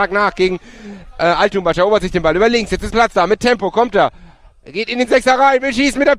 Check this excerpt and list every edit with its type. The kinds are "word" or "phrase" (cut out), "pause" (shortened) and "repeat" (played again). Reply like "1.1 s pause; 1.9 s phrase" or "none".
2.9 s word